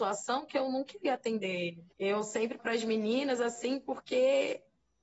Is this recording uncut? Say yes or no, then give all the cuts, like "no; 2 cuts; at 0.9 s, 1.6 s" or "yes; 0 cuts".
no; 2 cuts; at 1.9 s, 2.6 s